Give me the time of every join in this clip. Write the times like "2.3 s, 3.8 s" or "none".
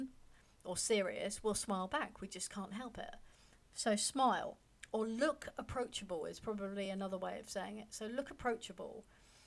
none